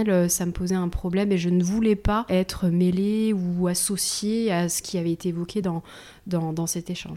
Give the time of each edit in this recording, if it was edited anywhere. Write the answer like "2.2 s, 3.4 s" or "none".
none